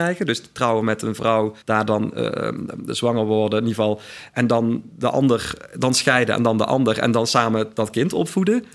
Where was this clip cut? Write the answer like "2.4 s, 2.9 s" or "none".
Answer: 1.6 s